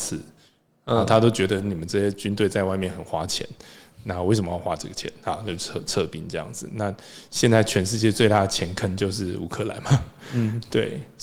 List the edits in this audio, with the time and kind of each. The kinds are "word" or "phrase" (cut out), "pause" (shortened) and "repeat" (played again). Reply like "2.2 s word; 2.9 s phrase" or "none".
none

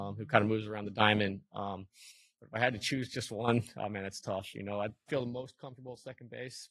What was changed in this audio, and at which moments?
5.1 s word

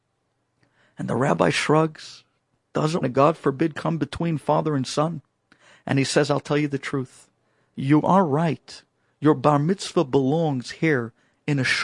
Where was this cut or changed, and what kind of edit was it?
3.0 s word

